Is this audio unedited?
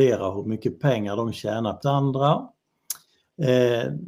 no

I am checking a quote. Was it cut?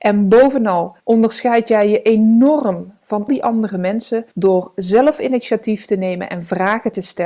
yes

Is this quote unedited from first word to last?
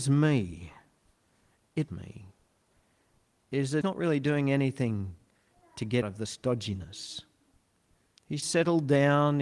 no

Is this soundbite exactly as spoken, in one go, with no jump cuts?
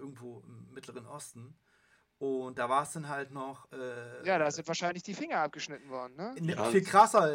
yes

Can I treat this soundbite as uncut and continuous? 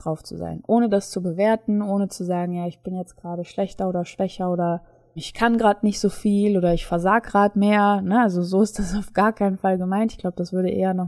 no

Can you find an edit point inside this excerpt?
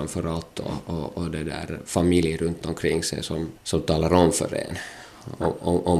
no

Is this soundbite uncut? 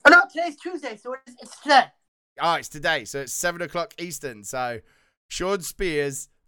yes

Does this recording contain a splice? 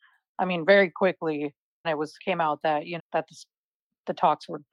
yes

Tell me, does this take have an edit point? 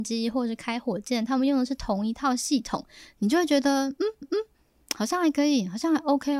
yes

